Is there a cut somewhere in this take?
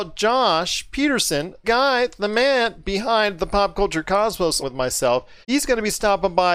yes; 3 cuts; at 1.6 s, 4.6 s, 5.4 s

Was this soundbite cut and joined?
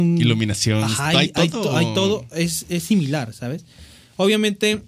no; 0 cuts

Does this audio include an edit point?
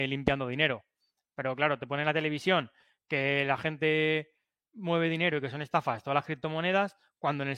no; 0 cuts

